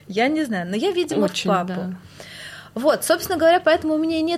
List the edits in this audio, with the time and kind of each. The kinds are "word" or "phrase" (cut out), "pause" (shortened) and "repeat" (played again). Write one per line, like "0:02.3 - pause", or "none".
none